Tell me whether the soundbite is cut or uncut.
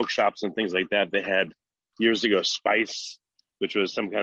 uncut